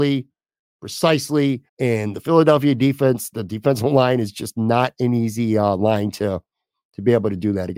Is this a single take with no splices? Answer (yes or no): no